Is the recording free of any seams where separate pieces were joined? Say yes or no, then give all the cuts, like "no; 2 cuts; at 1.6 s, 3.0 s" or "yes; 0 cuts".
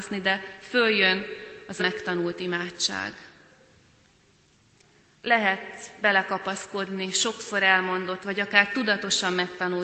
no; 3 cuts; at 1.8 s, 6.0 s, 8.2 s